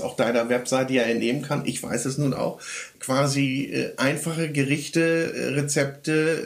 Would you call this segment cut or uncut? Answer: uncut